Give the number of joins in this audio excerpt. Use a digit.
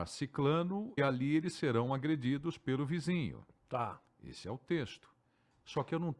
1